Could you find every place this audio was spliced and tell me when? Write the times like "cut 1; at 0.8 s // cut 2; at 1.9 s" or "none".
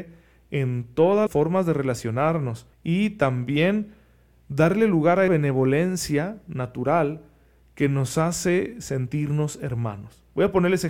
cut 1; at 1.3 s // cut 2; at 2.7 s // cut 3; at 5.3 s